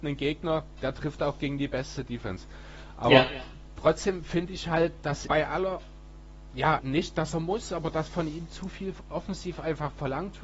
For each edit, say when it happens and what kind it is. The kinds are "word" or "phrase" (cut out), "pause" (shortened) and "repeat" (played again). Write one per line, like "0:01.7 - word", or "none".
0:05.3 - word
0:06.8 - word